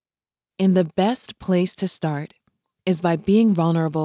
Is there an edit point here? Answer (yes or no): no